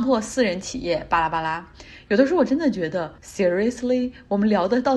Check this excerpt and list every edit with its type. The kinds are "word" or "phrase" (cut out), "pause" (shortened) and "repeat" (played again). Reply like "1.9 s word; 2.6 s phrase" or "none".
3.2 s pause